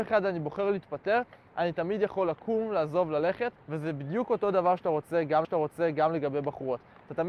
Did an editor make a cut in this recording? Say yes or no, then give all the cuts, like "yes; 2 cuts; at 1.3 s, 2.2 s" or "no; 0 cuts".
yes; 2 cuts; at 3.6 s, 5.4 s